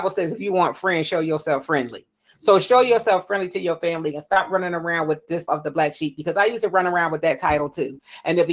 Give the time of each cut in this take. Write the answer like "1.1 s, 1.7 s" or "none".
5.5 s